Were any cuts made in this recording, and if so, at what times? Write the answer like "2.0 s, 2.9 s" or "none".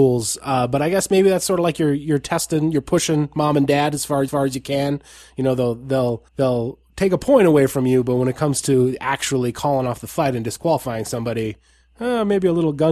4.3 s, 6.3 s